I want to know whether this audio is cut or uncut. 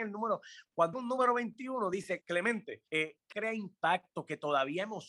cut